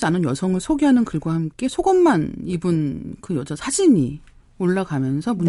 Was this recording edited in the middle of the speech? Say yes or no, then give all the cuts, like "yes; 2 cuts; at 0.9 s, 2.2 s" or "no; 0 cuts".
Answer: no; 0 cuts